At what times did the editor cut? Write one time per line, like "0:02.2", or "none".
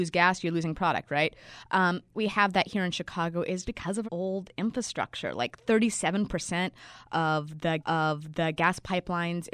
0:02.1
0:03.6
0:04.0
0:07.8

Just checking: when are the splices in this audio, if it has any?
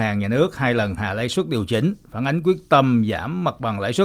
none

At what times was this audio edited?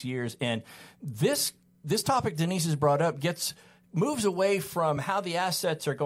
none

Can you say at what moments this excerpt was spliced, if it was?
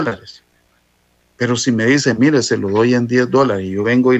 none

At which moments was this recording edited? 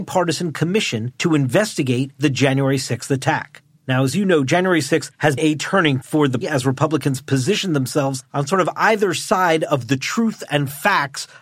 0:05.4
0:06.0
0:06.4

